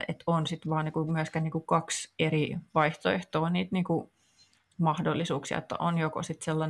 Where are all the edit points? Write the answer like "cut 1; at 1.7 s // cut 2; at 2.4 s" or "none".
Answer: none